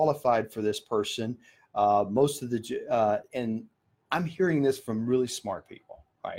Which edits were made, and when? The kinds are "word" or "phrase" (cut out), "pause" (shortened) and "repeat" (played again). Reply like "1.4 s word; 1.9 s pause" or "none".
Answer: 3.3 s word